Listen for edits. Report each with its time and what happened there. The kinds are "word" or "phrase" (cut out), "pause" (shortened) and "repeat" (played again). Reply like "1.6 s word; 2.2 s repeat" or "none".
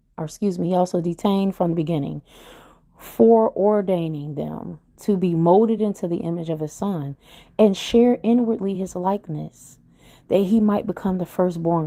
none

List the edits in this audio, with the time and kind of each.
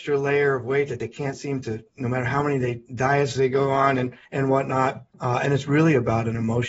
2.9 s pause; 4.3 s pause; 5.1 s pause

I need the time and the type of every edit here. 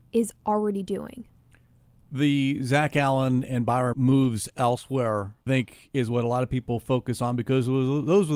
3.9 s word; 5.5 s word

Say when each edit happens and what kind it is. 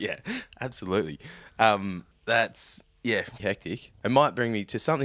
2.1 s pause; 3.4 s word

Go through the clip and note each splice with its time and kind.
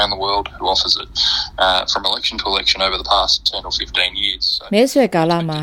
none

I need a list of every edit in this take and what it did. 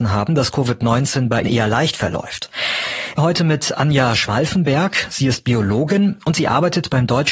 1.4 s word; 3.2 s word

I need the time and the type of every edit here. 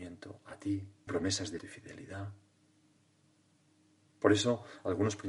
1.1 s word; 1.6 s word

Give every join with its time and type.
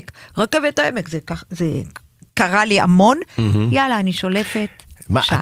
2.3 s word

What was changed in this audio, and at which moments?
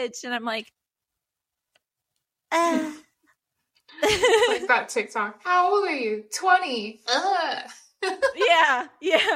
none

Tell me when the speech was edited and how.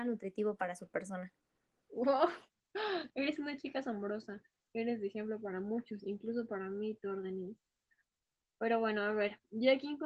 none

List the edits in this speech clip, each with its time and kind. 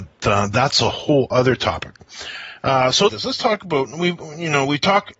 3.1 s phrase

